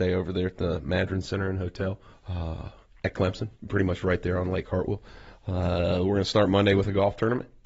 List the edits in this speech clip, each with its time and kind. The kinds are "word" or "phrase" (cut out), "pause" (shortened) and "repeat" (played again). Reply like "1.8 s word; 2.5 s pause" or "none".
2.1 s pause; 3.6 s pause

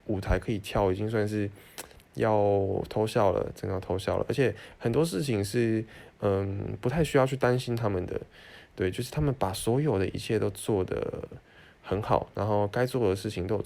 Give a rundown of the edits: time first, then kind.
none

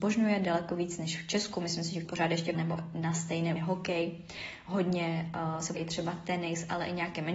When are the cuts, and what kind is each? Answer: 2.0 s word; 2.5 s word; 3.6 s word; 5.7 s word

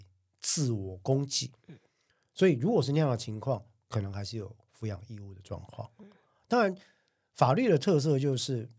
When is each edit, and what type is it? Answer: none

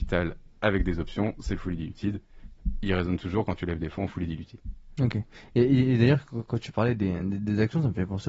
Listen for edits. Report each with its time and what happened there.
none

